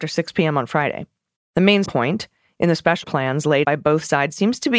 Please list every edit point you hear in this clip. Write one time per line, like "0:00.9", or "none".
0:01.4
0:01.9
0:03.0
0:03.6

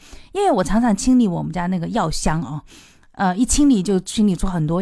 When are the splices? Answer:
none

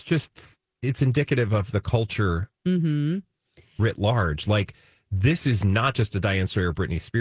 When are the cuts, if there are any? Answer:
none

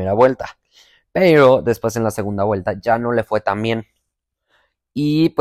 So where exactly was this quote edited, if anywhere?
none

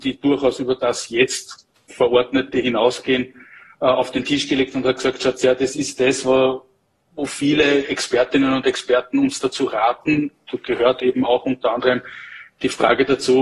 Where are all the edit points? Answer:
none

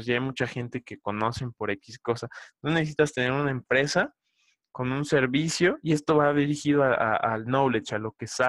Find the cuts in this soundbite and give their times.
none

